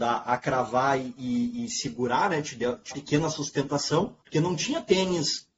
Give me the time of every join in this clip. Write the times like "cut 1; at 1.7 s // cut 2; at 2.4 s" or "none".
cut 1; at 2.9 s // cut 2; at 4.2 s